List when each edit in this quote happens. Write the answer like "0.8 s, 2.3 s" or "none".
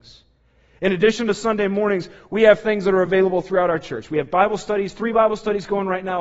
none